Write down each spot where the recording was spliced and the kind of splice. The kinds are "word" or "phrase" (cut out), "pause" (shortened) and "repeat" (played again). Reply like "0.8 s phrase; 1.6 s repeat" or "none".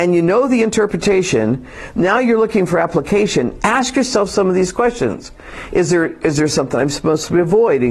none